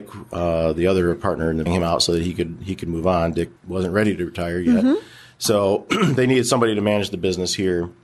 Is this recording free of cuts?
no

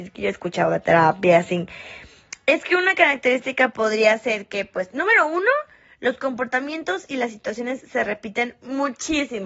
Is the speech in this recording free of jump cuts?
yes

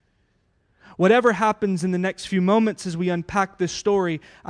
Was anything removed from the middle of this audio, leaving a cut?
no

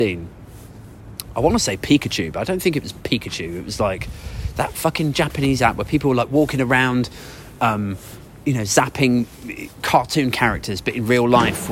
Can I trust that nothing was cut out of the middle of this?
yes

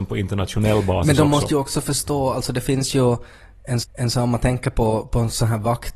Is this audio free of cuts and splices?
no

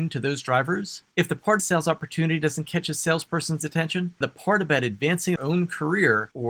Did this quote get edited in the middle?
yes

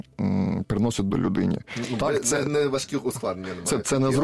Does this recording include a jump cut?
yes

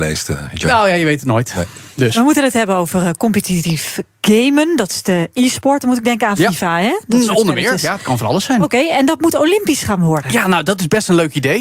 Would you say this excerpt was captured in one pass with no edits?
yes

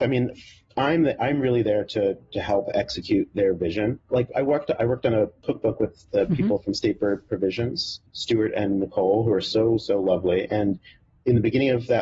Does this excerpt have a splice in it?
no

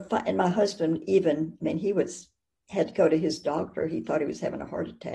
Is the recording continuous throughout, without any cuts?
yes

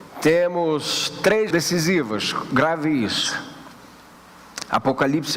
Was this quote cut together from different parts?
yes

